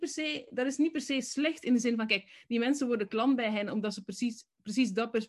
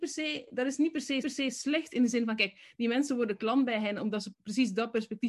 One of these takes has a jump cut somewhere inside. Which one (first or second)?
second